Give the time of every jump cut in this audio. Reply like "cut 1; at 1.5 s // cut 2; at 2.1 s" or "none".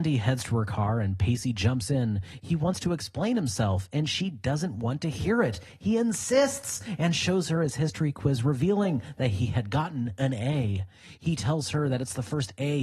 none